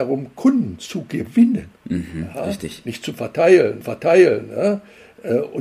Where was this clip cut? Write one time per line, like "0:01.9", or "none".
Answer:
0:01.8
0:03.8